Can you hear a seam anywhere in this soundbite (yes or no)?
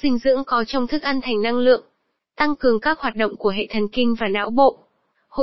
no